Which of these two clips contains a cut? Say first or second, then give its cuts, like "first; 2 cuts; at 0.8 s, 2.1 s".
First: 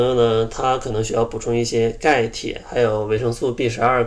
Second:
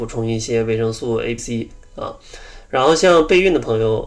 second; 1 cut; at 1.4 s